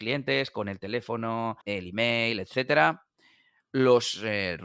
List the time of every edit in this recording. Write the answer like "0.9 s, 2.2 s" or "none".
1.6 s